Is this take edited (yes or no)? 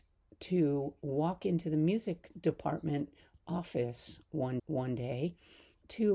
yes